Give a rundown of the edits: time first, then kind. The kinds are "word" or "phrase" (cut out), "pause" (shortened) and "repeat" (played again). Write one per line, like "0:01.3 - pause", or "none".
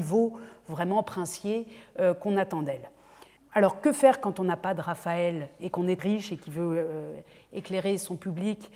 0:03.4 - pause
0:05.6 - word
0:06.0 - phrase